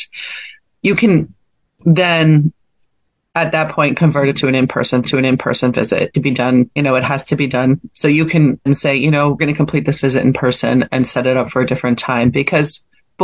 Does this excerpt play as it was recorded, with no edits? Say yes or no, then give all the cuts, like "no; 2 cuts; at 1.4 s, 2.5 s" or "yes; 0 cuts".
no; 6 cuts; at 5.0 s, 6.1 s, 6.8 s, 7.9 s, 8.7 s, 9.4 s